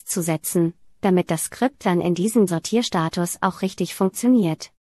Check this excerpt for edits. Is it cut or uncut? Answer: cut